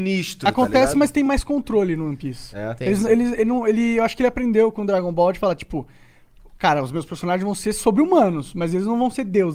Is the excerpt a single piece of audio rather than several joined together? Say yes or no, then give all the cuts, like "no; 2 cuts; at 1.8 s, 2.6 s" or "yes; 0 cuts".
yes; 0 cuts